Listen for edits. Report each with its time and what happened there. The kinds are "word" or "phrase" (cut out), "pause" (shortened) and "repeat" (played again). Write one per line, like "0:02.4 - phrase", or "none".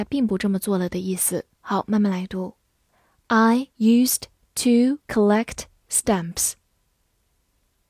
0:01.5 - pause
0:03.7 - pause
0:05.0 - pause